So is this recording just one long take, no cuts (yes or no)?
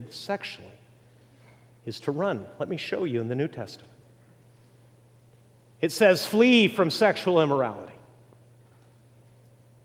yes